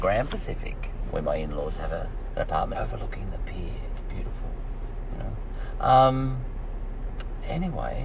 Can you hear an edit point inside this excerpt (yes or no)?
yes